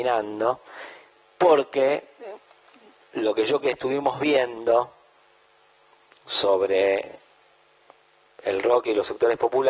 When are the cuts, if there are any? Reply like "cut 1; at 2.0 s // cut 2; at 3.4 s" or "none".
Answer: cut 1; at 3.6 s